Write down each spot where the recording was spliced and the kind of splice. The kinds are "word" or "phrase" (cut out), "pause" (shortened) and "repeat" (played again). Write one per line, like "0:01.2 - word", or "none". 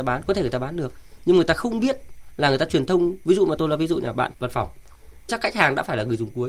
0:03.6 - word
0:04.3 - word
0:05.3 - word